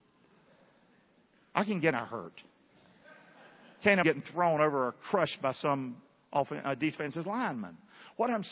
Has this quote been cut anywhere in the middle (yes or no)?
yes